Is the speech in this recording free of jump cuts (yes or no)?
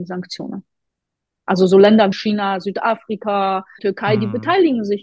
no